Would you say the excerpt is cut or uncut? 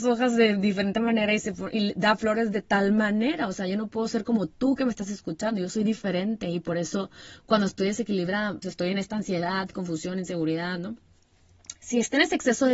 cut